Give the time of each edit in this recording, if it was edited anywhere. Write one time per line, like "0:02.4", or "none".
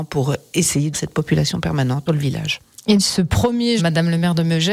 0:00.9
0:02.1
0:03.0
0:03.8